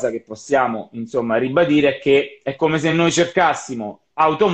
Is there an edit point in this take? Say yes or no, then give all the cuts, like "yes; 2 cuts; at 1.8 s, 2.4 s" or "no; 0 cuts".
no; 0 cuts